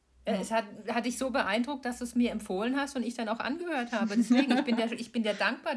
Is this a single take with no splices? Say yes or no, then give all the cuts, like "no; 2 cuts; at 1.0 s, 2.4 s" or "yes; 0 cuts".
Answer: yes; 0 cuts